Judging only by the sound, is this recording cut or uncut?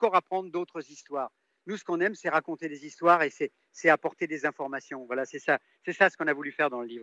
uncut